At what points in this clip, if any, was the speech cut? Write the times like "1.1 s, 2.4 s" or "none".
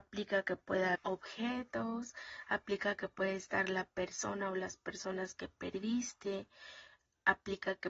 1.0 s